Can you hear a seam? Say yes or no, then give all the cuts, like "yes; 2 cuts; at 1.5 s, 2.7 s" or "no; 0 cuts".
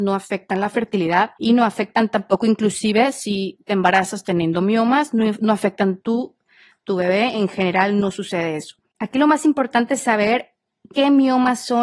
yes; 1 cut; at 1.3 s